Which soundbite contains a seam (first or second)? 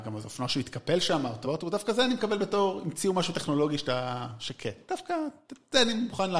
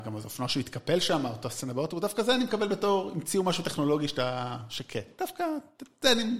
first